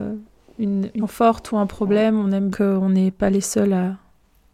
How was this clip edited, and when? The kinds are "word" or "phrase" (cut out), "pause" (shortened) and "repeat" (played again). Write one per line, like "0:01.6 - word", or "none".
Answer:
0:01.0 - word
0:02.5 - phrase